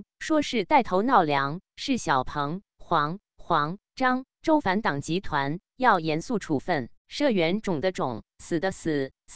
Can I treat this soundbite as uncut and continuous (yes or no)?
no